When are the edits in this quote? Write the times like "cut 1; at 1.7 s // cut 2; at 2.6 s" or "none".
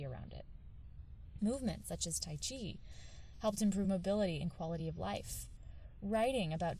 none

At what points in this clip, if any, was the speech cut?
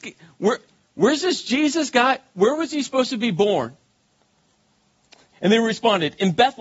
none

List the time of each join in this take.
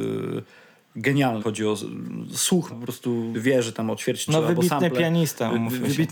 cut 1; at 1.4 s // cut 2; at 2.7 s // cut 3; at 3.3 s // cut 4; at 4.3 s

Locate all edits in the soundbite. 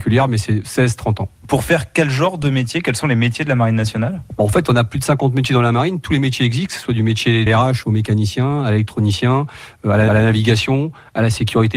cut 1; at 7.5 s // cut 2; at 10.1 s

